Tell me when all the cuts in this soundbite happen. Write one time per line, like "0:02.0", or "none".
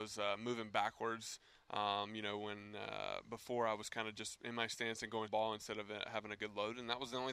0:05.3